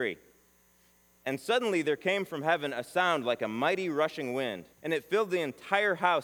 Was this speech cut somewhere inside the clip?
yes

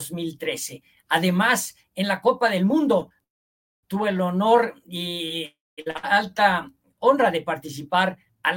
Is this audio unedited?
yes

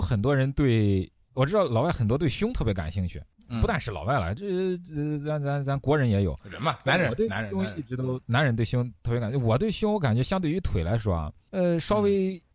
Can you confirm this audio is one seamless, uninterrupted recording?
yes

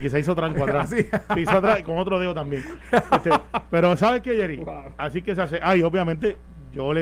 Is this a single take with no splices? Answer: yes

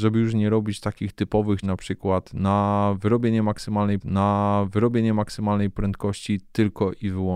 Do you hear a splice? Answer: yes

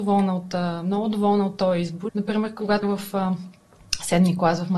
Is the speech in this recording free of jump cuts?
no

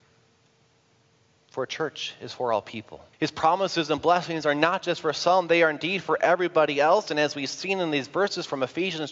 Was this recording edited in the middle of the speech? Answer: yes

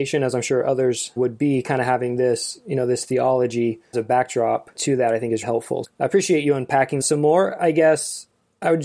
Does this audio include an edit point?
yes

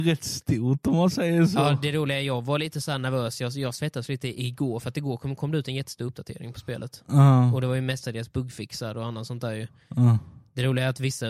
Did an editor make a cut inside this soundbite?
no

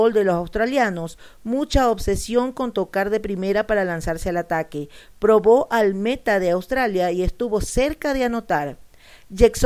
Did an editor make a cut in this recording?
no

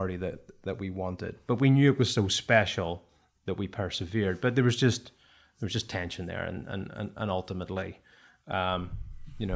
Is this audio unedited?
yes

